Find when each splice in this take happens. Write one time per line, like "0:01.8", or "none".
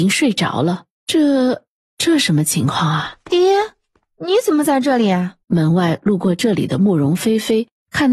0:00.9
0:03.2
0:05.4